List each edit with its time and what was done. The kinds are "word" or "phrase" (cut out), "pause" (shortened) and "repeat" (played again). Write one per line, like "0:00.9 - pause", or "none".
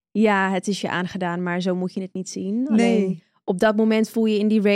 none